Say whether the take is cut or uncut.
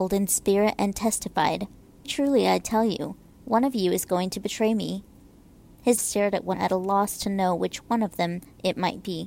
cut